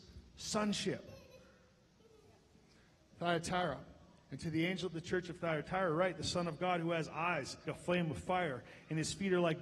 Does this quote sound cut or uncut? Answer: cut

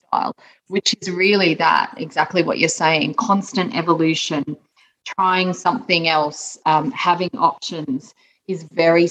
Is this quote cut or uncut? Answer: uncut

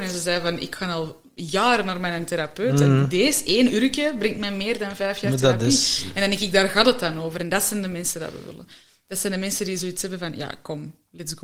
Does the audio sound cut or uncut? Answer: uncut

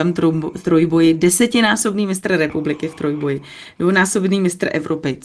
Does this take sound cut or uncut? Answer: uncut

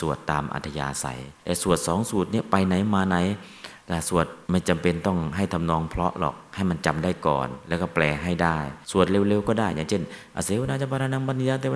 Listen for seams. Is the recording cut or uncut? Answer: cut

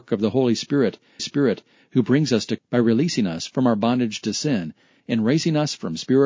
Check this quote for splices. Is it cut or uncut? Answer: cut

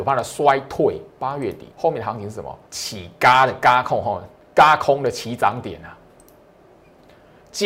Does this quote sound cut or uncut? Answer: cut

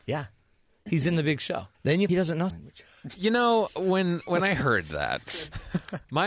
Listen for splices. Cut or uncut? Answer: cut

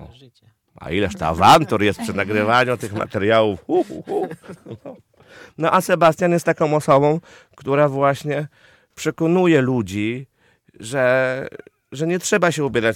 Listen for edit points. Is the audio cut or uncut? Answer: uncut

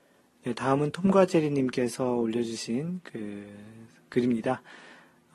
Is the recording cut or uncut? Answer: uncut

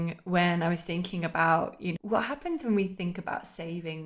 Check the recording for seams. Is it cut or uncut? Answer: cut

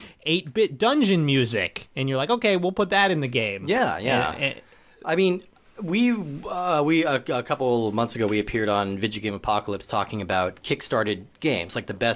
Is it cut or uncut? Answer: uncut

